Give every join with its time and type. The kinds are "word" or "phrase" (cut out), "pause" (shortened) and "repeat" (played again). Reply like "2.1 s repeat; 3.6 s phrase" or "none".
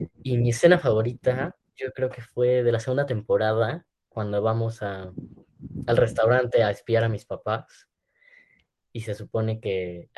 none